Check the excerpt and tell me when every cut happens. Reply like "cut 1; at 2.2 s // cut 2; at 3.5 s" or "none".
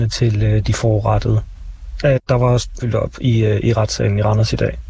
cut 1; at 2.2 s // cut 2; at 2.8 s